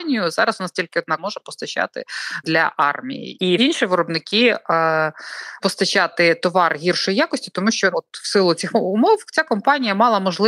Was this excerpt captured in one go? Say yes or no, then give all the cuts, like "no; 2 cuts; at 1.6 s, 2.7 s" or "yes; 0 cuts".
no; 6 cuts; at 1.2 s, 2.4 s, 3.6 s, 5.6 s, 7.9 s, 8.7 s